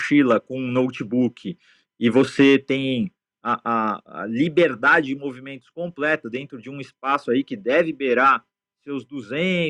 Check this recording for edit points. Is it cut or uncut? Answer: uncut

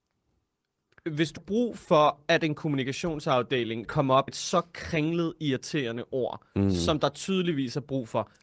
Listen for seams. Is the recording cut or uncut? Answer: cut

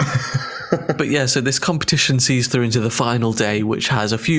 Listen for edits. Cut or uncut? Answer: uncut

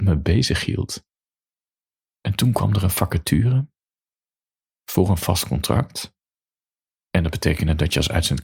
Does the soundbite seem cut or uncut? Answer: uncut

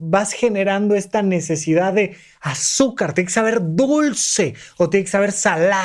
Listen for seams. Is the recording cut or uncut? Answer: uncut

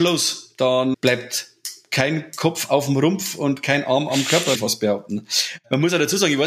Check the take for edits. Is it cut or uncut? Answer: cut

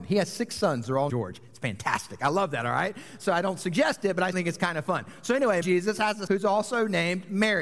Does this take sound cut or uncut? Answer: cut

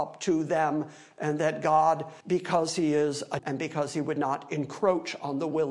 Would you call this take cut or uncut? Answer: cut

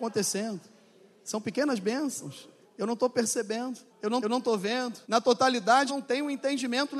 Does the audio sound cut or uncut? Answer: cut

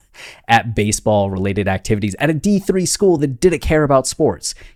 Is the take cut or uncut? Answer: uncut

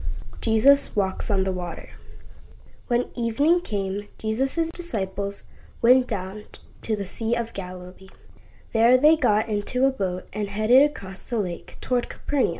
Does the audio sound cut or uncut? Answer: uncut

